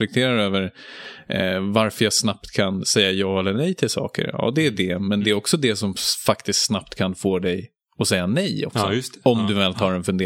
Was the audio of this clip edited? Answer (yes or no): no